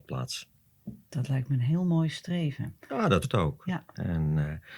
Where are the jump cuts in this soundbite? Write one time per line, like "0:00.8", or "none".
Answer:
0:01.0
0:02.8
0:03.2